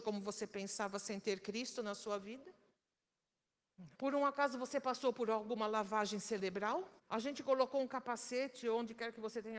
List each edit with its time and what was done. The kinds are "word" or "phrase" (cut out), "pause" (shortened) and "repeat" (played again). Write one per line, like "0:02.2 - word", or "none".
0:03.9 - pause
0:07.0 - pause